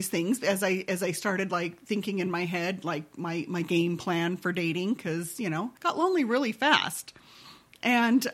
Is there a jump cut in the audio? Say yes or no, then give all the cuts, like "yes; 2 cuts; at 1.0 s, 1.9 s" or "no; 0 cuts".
yes; 1 cut; at 5.8 s